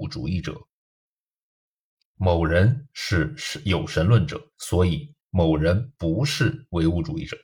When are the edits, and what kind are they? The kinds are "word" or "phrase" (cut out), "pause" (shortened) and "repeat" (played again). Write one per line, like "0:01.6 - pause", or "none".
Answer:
0:04.5 - pause